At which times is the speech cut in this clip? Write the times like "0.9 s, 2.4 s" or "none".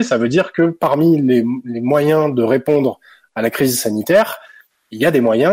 none

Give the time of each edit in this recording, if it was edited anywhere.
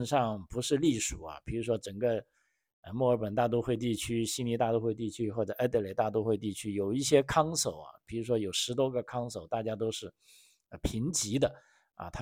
none

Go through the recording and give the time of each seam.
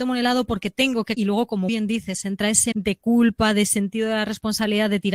1.2 s, 1.7 s, 2.7 s

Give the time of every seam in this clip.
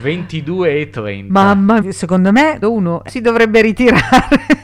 1.8 s, 2.6 s, 3.1 s

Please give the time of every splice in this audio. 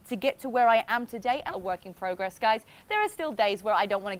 1.5 s

